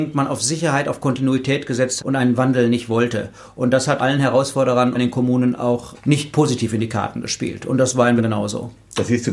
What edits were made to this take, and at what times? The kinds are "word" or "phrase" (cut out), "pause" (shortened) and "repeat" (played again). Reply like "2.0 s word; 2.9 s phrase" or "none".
2.0 s word; 4.0 s word; 4.9 s word; 5.9 s word; 8.2 s word

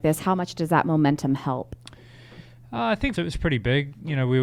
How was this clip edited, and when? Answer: 3.2 s phrase

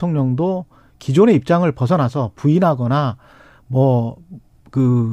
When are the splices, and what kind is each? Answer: none

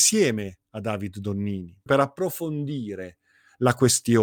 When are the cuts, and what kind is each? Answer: 1.9 s word

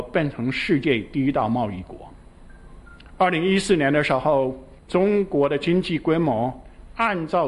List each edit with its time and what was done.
4.8 s pause

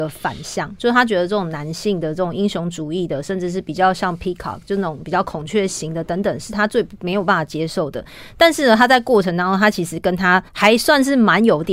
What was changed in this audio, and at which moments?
10.5 s pause

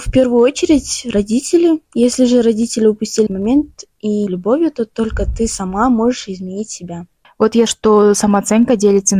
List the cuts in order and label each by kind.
3.3 s word; 4.3 s phrase; 7.2 s pause; 7.7 s word

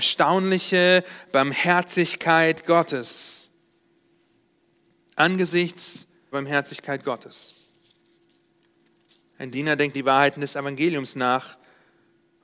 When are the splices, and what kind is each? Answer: 6.3 s word; 9.5 s word; 9.9 s word

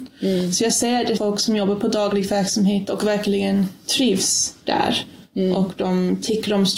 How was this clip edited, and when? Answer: 1.2 s word

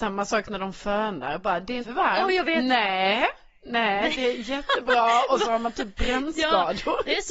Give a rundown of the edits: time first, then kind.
1.8 s word

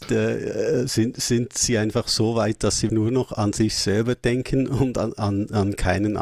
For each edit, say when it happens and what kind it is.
2.9 s word

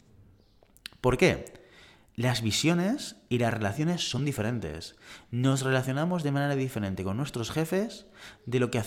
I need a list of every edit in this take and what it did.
none

